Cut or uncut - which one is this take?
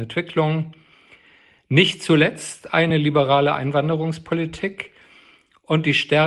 uncut